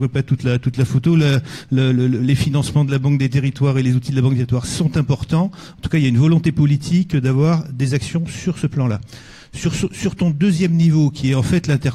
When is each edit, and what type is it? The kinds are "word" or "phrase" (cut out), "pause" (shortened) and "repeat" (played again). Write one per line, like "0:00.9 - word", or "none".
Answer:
none